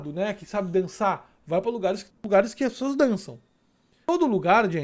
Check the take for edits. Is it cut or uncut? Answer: cut